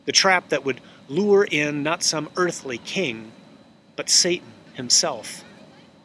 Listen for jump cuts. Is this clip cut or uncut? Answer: uncut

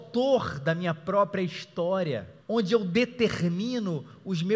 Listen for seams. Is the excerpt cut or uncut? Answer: cut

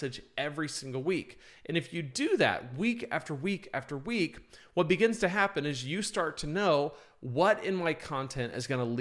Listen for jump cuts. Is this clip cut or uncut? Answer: uncut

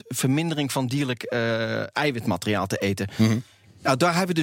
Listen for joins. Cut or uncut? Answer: uncut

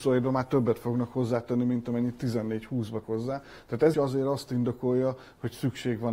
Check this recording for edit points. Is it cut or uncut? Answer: cut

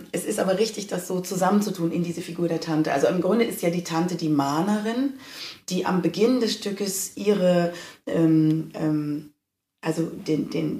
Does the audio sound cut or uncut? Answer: uncut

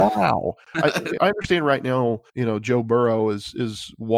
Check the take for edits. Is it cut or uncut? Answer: cut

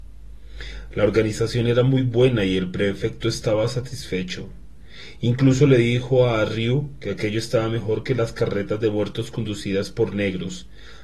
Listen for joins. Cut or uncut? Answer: uncut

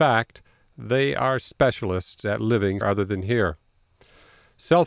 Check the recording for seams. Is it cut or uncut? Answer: cut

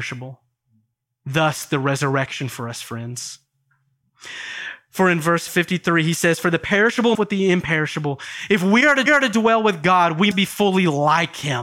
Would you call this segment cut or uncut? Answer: cut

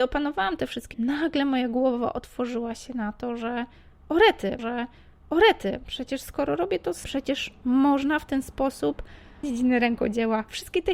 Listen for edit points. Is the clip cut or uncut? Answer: cut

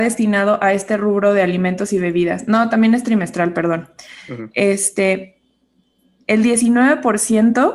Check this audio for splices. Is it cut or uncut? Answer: uncut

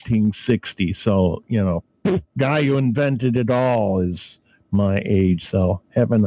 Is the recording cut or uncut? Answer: uncut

